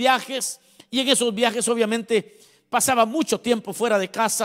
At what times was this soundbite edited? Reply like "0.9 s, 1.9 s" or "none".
none